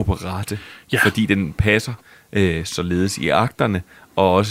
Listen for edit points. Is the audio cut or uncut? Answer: uncut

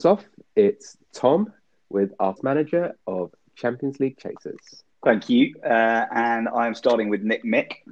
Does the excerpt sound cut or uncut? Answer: cut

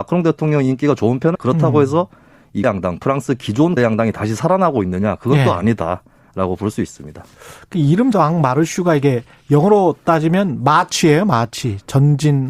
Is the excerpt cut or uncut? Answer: cut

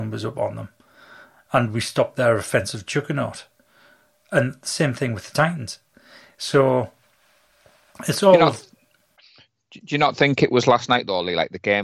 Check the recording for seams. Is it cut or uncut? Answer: uncut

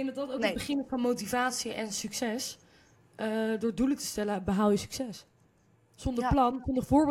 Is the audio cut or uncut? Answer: uncut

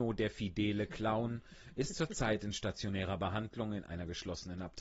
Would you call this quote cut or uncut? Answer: uncut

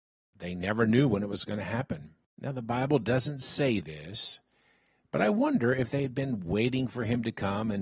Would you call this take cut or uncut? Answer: uncut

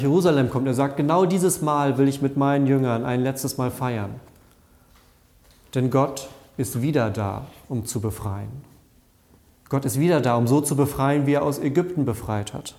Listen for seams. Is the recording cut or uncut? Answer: uncut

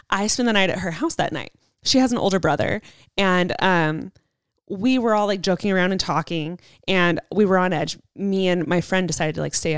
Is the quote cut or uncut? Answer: uncut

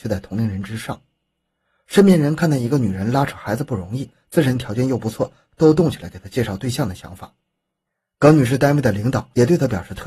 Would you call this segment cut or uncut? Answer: uncut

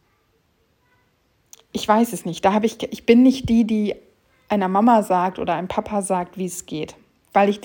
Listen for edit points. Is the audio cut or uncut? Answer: uncut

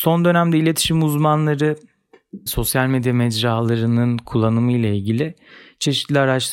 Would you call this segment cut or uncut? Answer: cut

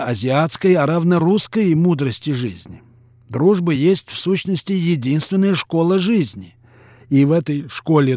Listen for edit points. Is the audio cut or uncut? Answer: uncut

